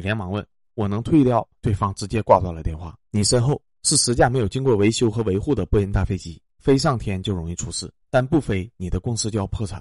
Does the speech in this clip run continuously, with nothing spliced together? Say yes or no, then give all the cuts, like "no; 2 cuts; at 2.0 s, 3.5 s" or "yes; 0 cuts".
no; 4 cuts; at 1.6 s, 3.1 s, 6.5 s, 8.0 s